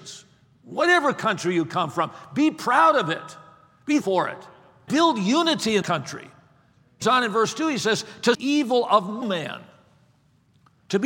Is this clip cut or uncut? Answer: cut